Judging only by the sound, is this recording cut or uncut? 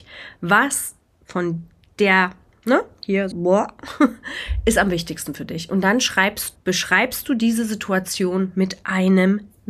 cut